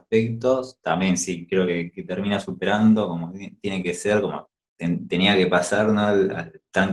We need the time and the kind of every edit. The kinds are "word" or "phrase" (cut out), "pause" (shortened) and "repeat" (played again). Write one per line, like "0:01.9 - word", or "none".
none